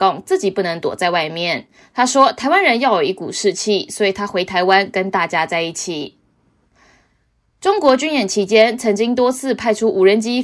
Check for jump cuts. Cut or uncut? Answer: uncut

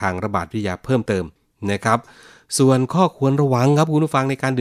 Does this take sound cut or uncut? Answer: uncut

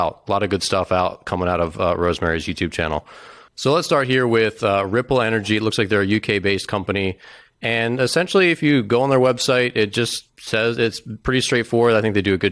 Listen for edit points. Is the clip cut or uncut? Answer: cut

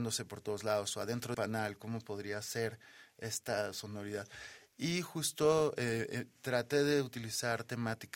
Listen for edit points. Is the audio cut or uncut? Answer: cut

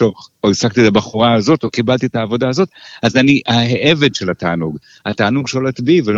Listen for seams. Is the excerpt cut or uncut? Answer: uncut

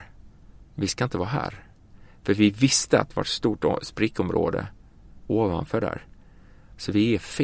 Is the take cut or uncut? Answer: uncut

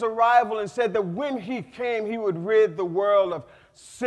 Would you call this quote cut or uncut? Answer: uncut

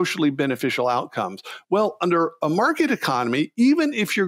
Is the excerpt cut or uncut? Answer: uncut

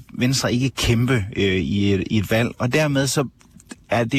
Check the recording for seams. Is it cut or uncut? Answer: uncut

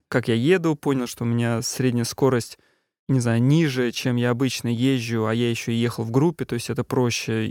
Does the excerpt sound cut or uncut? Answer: uncut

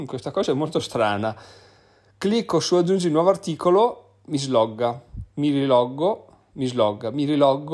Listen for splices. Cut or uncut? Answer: uncut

